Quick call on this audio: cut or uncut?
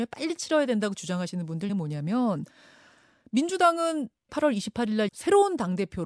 cut